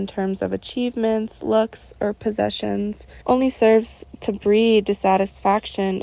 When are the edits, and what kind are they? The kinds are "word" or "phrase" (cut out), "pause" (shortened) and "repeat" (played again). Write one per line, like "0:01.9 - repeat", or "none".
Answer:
0:03.2 - pause